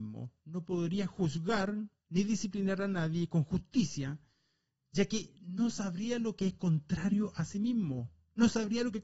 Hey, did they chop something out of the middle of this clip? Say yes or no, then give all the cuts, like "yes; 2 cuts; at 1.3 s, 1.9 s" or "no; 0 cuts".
no; 0 cuts